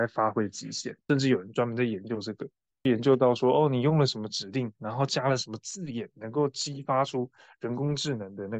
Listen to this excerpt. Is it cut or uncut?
uncut